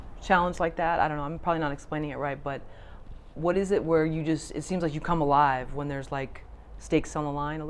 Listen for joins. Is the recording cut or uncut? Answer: uncut